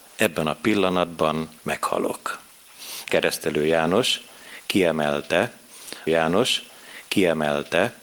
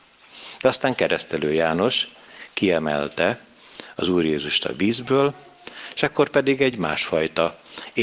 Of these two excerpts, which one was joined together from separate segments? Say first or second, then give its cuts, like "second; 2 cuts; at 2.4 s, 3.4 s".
first; 3 cuts; at 1.6 s, 3.1 s, 6.1 s